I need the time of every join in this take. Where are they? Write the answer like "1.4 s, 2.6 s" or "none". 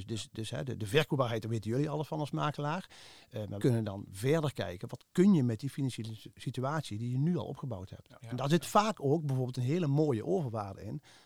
3.6 s